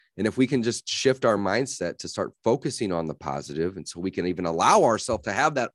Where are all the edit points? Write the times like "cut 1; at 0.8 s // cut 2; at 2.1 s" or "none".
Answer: none